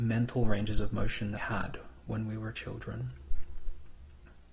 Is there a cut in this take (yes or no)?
yes